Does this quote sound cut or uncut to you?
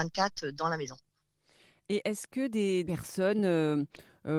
uncut